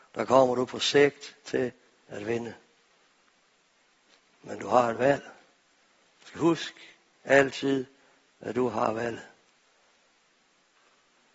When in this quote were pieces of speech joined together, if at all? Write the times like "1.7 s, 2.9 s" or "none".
none